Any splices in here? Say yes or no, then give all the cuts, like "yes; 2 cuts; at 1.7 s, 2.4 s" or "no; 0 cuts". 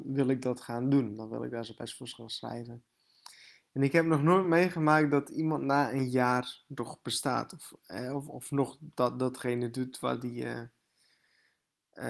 no; 0 cuts